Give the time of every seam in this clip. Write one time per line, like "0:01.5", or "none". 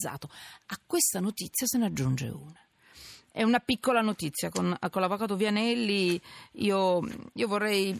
none